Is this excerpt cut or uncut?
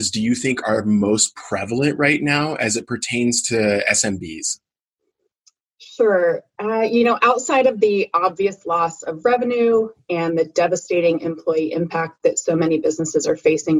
uncut